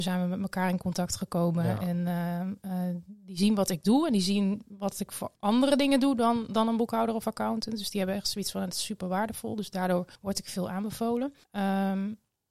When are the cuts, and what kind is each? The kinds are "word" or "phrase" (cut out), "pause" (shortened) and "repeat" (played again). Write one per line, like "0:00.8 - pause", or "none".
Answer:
0:05.4 - pause
0:10.1 - pause
0:11.4 - pause